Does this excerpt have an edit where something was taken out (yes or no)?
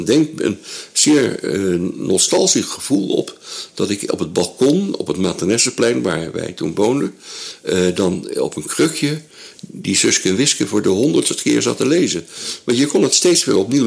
no